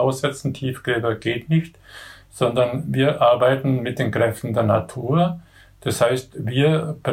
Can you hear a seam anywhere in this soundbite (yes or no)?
no